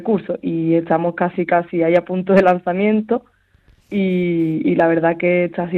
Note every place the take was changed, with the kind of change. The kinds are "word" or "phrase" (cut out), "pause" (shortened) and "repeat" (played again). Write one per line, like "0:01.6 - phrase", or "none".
none